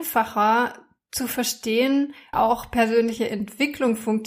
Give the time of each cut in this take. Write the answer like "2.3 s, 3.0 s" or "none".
2.3 s